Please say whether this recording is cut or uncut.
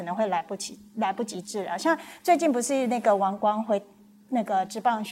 uncut